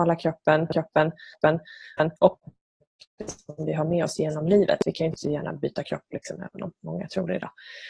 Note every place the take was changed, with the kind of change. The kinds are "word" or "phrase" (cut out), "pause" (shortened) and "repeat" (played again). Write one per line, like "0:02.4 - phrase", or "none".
0:02.2 - pause

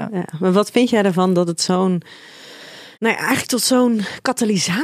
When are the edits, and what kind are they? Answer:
0:02.9 - pause

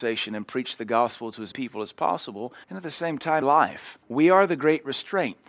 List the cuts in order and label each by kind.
0:01.5 - word
0:02.6 - pause
0:03.4 - word
0:04.0 - pause

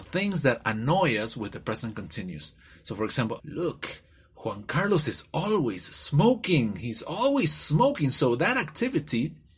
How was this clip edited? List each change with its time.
0:03.4 - word

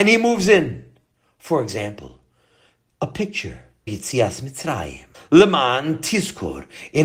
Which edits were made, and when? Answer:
0:03.9 - word
0:05.1 - pause

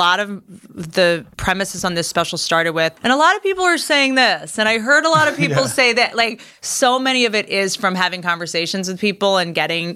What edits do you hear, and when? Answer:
0:01.3 - pause
0:03.0 - pause

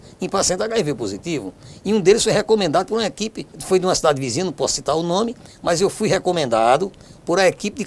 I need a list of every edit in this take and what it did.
0:03.5 - pause

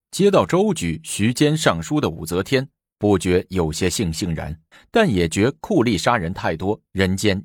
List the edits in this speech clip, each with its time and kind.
0:04.7 - pause

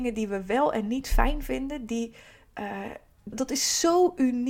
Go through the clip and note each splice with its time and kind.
0:03.3 - word

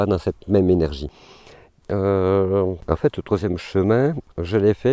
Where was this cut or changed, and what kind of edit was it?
none

